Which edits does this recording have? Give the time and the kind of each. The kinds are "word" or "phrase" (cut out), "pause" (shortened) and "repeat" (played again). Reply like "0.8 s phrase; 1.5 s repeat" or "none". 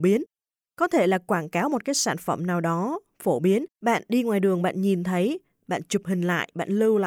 3.7 s pause

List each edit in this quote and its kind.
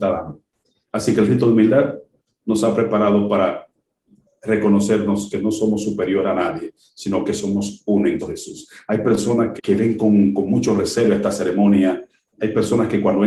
8.2 s word; 9.6 s word

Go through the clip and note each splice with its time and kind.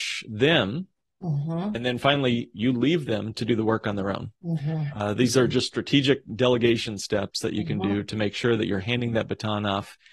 none

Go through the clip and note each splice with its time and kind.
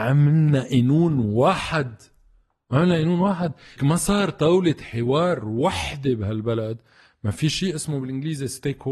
3.8 s word

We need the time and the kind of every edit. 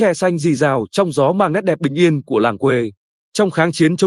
none

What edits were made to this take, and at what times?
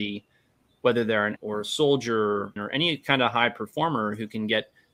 1.4 s word; 2.6 s phrase

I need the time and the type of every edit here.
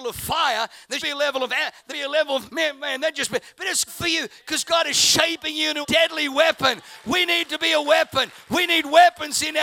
1.0 s word; 1.9 s word; 2.5 s word; 3.9 s word; 5.8 s word

